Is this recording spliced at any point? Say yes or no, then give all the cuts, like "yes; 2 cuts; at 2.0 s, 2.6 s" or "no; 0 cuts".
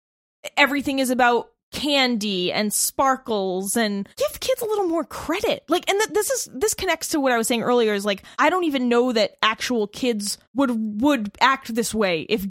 yes; 3 cuts; at 4.1 s, 8.3 s, 10.4 s